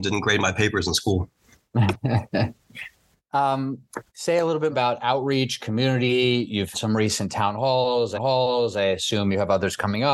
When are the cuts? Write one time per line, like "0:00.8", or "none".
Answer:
0:04.1
0:04.7
0:06.7
0:08.1